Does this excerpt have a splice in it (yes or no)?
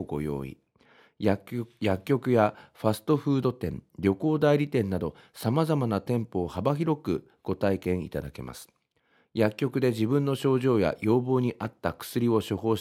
no